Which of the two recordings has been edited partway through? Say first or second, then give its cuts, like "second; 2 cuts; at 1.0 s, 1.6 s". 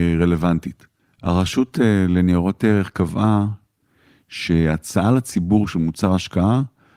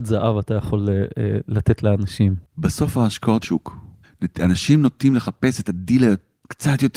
second; 2 cuts; at 2.5 s, 3.4 s